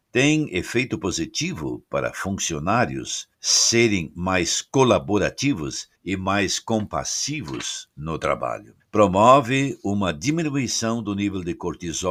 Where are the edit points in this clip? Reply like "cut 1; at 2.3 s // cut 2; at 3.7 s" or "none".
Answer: cut 1; at 3.3 s // cut 2; at 5.9 s // cut 3; at 8.8 s